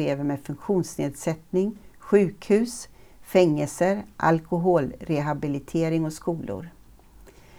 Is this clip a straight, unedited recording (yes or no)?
yes